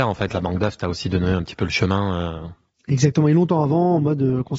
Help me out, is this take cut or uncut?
uncut